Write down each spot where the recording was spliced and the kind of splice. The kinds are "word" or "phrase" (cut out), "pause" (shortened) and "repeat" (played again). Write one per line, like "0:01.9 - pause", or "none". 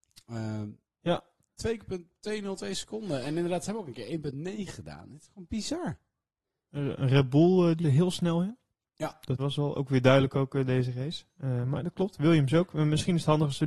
0:07.8 - word
0:09.4 - word